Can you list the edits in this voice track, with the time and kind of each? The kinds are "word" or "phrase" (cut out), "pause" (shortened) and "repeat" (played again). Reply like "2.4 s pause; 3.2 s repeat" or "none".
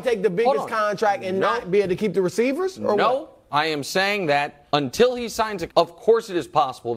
4.7 s pause; 5.7 s phrase